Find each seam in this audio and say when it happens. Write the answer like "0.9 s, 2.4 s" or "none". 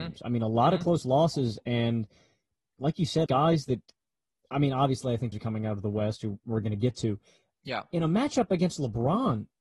3.3 s, 5.3 s